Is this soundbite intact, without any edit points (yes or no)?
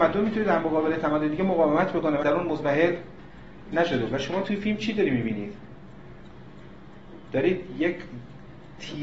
no